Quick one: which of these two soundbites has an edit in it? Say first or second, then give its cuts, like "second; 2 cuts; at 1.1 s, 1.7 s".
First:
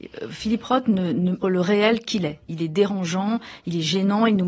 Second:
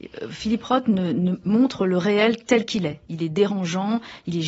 first; 2 cuts; at 1.4 s, 2.0 s